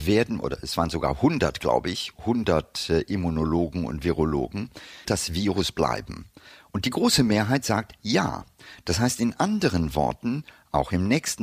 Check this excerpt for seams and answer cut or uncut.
cut